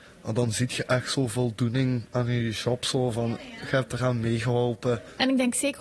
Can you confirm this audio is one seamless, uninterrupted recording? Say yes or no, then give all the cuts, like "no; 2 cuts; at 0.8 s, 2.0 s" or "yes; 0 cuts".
yes; 0 cuts